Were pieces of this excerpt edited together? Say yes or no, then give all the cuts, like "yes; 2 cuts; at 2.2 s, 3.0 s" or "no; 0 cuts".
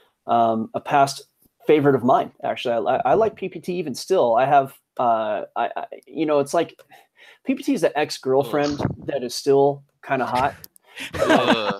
no; 0 cuts